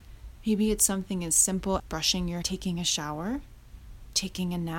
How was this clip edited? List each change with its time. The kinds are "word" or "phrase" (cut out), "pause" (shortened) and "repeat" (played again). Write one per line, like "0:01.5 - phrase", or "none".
0:01.8 - word
0:02.4 - word